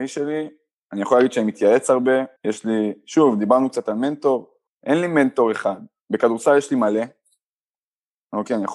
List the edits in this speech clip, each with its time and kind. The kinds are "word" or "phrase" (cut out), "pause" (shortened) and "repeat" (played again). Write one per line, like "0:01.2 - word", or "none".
0:02.4 - pause
0:04.7 - pause